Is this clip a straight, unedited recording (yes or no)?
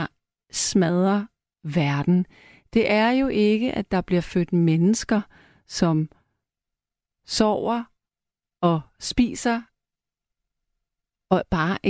yes